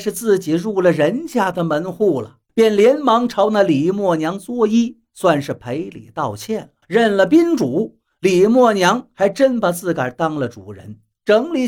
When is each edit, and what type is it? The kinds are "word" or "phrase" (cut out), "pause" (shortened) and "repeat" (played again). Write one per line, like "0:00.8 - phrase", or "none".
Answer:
0:02.5 - pause
0:06.8 - pause